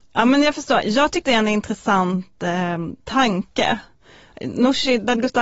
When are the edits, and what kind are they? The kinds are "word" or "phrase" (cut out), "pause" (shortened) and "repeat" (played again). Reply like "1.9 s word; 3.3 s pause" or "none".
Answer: 1.2 s word

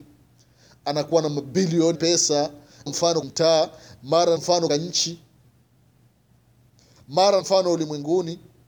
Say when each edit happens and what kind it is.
1.9 s word; 2.9 s word; 3.2 s word; 4.4 s word; 4.7 s word; 7.4 s word

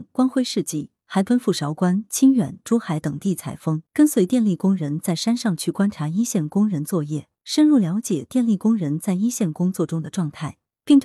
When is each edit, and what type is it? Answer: 3.9 s pause; 7.4 s pause

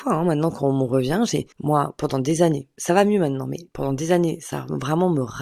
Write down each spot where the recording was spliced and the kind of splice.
1.5 s pause

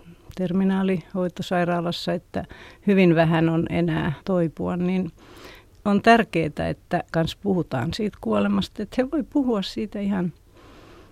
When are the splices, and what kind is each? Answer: 4.2 s word; 7.1 s word

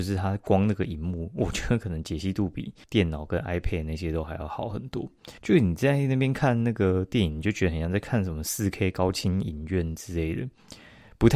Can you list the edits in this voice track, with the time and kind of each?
2.8 s pause; 5.4 s pause

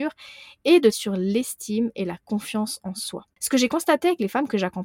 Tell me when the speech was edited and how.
0.9 s word; 3.3 s pause

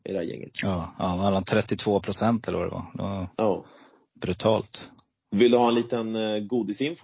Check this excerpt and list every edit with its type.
none

